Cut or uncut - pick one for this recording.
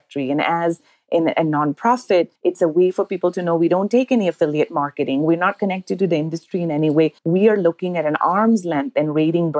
cut